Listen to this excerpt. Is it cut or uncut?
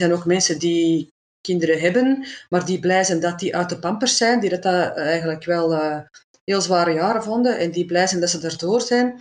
uncut